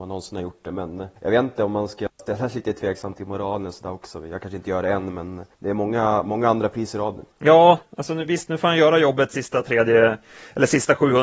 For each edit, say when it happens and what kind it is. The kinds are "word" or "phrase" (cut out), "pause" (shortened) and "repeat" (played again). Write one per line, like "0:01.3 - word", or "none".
0:01.2 - pause
0:05.5 - pause
0:07.3 - pause